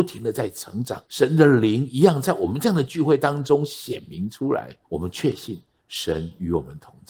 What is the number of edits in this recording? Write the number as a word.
two